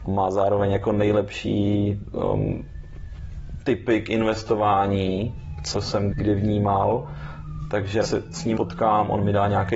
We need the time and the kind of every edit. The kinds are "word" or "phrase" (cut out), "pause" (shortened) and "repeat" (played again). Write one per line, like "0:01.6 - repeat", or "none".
0:05.7 - word
0:06.1 - word
0:08.0 - word
0:08.5 - word